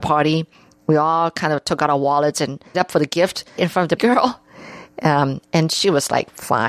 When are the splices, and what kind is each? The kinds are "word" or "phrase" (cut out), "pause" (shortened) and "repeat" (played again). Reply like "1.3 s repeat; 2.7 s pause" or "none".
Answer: 2.7 s word; 3.6 s word; 4.0 s word